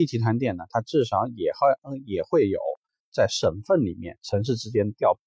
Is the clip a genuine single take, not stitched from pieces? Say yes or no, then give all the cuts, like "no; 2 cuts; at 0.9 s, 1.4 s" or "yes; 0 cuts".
yes; 0 cuts